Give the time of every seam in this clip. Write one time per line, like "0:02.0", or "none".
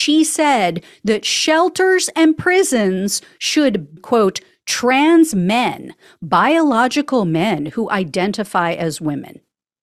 0:04.0